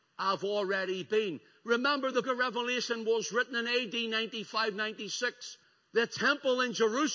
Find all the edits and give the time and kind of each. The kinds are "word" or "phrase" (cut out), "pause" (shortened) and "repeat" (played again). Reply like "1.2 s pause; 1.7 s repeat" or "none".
2.2 s word; 5.6 s pause